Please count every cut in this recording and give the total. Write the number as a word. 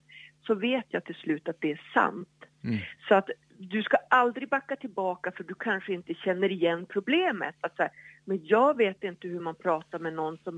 zero